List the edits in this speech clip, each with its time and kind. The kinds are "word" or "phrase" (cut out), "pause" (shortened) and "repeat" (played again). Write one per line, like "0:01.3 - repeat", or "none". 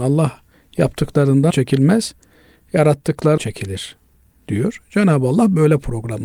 0:01.5 - word
0:03.4 - word